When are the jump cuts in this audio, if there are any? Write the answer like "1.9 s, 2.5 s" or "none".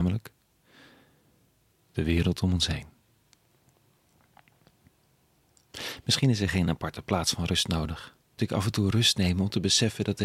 8.4 s